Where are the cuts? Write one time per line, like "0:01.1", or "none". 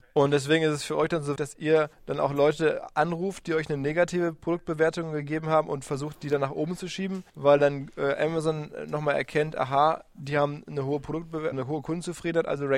0:01.4
0:01.9
0:07.3
0:11.5